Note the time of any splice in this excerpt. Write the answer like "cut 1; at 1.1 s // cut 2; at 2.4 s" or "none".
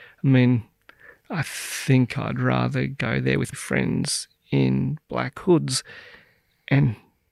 cut 1; at 3.5 s